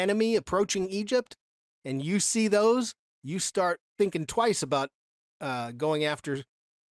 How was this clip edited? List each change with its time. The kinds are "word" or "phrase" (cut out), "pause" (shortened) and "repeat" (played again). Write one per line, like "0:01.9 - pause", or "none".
none